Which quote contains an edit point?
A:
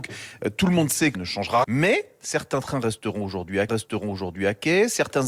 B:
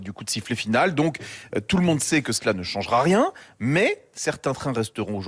A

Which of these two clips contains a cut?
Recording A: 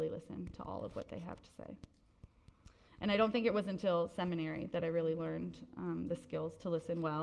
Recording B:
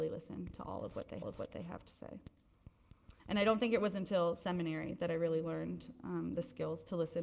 B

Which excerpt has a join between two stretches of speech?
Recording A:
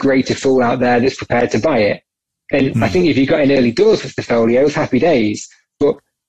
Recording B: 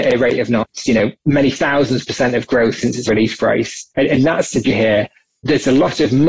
B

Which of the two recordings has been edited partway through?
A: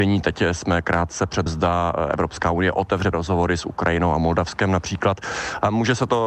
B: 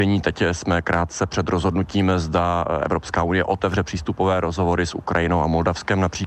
A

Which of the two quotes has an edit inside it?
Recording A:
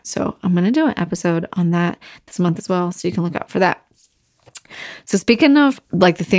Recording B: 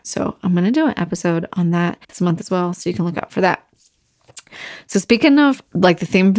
B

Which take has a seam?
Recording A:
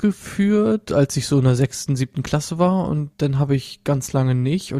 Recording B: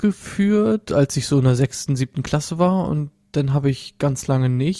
A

